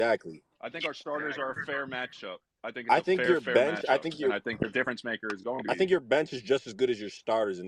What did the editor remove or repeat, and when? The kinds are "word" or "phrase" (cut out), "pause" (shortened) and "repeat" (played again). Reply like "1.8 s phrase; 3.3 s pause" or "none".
none